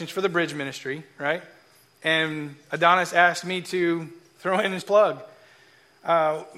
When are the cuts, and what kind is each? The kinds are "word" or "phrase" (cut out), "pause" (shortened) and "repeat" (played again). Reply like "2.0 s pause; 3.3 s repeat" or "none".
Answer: 4.8 s word